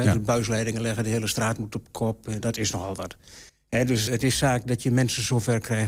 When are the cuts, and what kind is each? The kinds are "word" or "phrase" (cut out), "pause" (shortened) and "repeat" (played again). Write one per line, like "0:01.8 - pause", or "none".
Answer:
0:02.4 - word
0:03.5 - pause
0:04.1 - word